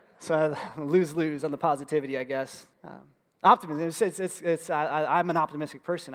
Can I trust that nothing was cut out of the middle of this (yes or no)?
no